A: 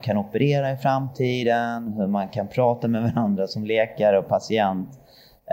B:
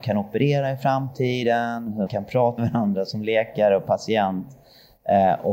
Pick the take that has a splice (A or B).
B